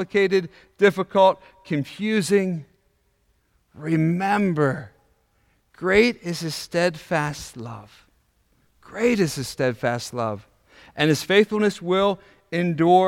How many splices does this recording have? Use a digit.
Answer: 0